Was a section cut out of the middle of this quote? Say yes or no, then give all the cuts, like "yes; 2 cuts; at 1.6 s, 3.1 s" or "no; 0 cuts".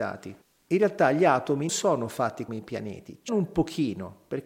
yes; 3 cuts; at 1.7 s, 2.5 s, 3.3 s